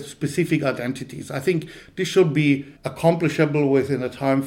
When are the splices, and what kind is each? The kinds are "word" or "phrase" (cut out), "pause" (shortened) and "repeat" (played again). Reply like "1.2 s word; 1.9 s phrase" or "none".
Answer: 2.8 s pause